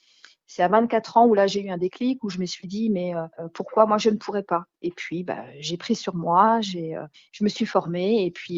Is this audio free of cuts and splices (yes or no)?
no